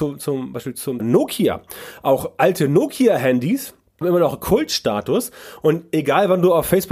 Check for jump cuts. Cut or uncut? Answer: cut